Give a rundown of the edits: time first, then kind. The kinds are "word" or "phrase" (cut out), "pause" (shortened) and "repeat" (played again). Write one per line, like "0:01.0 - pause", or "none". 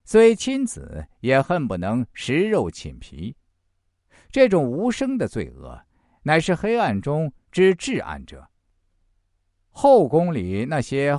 none